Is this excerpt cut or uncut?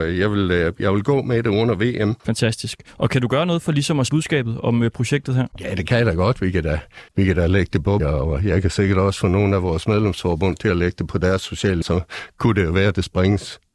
cut